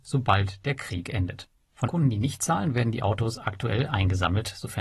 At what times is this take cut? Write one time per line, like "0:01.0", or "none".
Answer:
0:01.9